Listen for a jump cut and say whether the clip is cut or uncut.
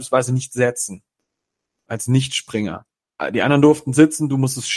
uncut